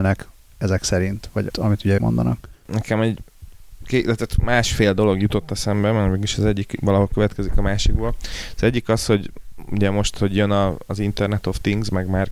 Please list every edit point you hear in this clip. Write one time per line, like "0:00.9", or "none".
0:01.5
0:02.0